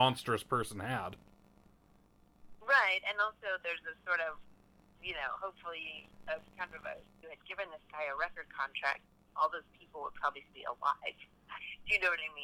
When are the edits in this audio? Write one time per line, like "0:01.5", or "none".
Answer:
0:06.5
0:07.2
0:10.5